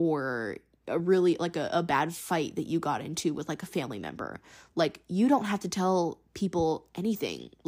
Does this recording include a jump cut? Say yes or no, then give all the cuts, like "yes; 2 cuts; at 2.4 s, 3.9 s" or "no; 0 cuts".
no; 0 cuts